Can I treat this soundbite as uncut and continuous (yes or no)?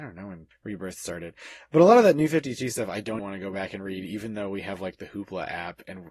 no